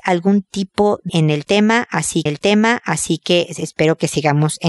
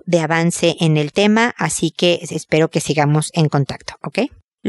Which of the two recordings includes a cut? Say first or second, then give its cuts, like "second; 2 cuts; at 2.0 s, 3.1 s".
first; 2 cuts; at 1.1 s, 2.3 s